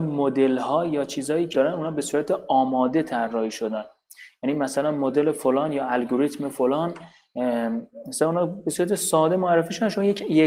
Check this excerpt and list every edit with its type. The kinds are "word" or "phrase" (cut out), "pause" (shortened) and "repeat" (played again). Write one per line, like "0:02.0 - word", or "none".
0:01.5 - word